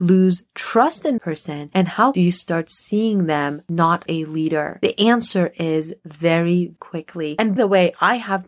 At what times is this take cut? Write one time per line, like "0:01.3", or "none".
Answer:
0:01.2
0:02.1
0:04.1
0:06.8
0:07.6